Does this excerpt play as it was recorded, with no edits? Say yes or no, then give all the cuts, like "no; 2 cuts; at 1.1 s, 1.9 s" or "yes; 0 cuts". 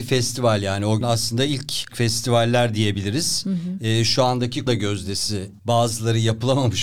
no; 4 cuts; at 1.0 s, 1.9 s, 4.7 s, 5.6 s